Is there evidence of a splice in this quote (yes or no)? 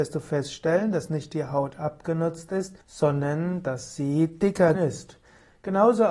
yes